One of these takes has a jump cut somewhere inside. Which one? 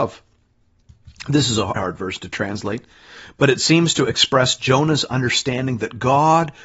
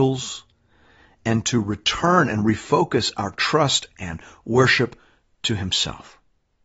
first; 1 cut; at 1.8 s

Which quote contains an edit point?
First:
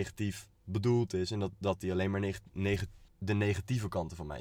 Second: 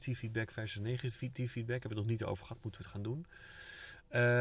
first; 1 cut; at 3.1 s

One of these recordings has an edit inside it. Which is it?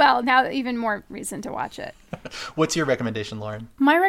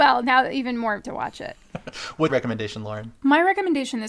second; 2 cuts; at 1.0 s, 2.3 s

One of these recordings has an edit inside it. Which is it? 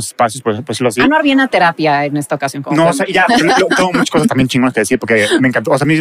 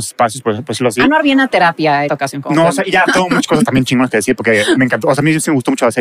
second; 2 cuts; at 2.1 s, 3.1 s

